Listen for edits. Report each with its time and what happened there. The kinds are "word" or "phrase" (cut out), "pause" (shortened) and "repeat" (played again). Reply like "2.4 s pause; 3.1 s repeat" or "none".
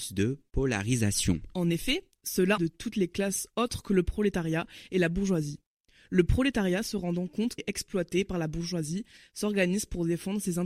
2.6 s phrase; 7.6 s word